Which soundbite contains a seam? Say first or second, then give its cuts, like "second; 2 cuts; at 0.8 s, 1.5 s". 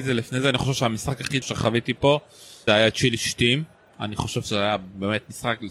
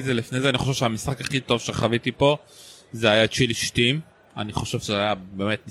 first; 2 cuts; at 1.4 s, 2.7 s